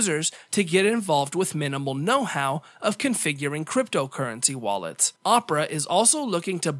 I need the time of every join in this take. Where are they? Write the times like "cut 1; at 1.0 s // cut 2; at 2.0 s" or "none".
cut 1; at 5.2 s